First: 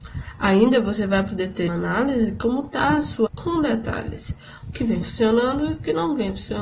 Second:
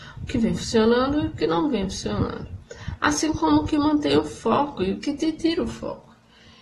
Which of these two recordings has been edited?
first; 2 cuts; at 1.7 s, 3.3 s

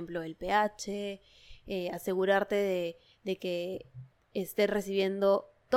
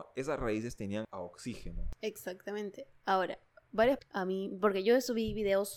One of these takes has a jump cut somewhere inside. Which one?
second; 2 cuts; at 1.0 s, 4.0 s

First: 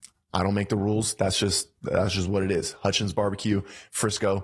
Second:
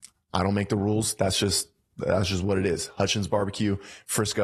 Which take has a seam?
first; 1 cut; at 1.7 s

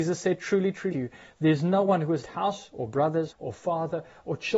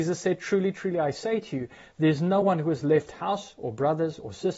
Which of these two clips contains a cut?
first; 3 cuts; at 0.9 s, 2.2 s, 3.3 s

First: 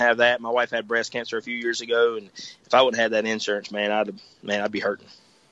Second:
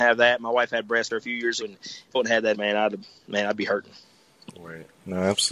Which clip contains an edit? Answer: second; 4 cuts; at 1.1 s, 1.6 s, 2.1 s, 2.5 s

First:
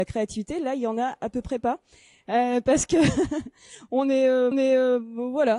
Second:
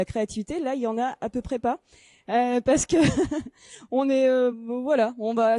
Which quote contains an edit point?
first; 1 cut; at 4.5 s

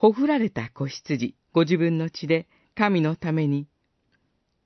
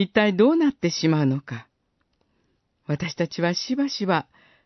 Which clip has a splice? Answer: first; 2 cuts; at 1.4 s, 2.6 s

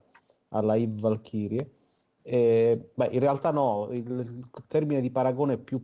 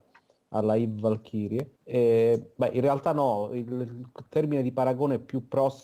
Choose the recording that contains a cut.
second; 1 cut; at 1.7 s

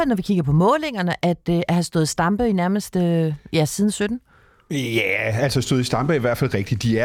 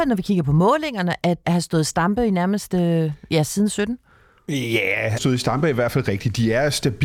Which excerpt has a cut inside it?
second; 2 cuts; at 1.4 s, 5.2 s

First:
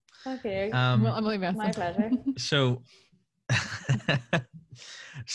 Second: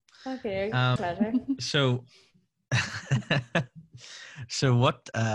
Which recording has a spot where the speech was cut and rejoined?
second; 1 cut; at 1.0 s

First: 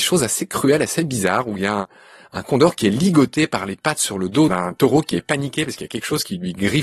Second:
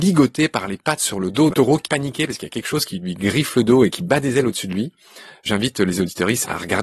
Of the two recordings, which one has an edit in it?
second; 2 cuts; at 1.5 s, 1.8 s

